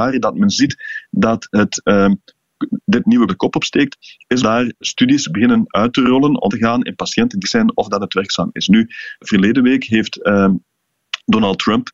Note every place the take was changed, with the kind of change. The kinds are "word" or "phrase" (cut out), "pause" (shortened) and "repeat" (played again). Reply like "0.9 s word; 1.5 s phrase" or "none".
3.3 s word; 4.4 s word; 4.8 s word; 6.5 s word; 7.4 s word; 9.2 s word